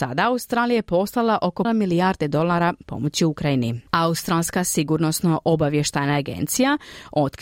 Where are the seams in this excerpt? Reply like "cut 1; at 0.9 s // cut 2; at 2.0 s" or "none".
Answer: cut 1; at 1.6 s // cut 2; at 3.9 s